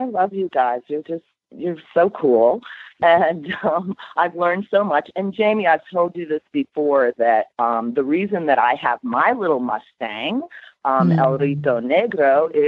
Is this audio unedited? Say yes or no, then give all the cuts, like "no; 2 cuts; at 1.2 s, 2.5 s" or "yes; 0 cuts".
no; 1 cut; at 7.5 s